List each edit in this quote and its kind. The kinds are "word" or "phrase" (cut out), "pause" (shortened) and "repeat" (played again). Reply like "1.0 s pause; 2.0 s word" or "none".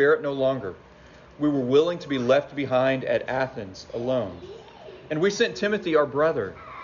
none